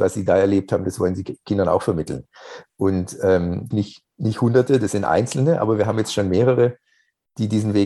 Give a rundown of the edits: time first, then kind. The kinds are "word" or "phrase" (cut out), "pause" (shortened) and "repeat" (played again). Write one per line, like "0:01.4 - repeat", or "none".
0:03.7 - phrase
0:04.1 - pause